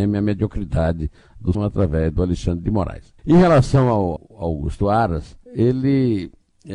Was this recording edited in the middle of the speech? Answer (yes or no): yes